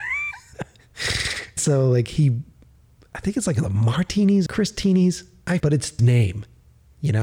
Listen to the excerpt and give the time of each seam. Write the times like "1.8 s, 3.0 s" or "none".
1.6 s, 4.5 s, 5.6 s, 6.0 s